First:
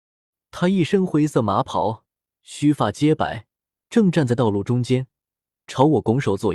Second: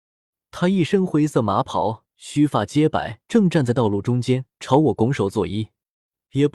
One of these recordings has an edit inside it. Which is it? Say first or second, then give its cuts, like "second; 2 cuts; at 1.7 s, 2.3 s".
second; 3 cuts; at 2.1 s, 3.2 s, 4.5 s